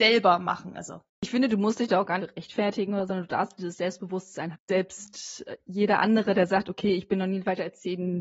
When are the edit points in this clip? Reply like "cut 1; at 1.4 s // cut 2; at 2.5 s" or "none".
cut 1; at 1.1 s // cut 2; at 2.2 s // cut 3; at 3.1 s // cut 4; at 4.5 s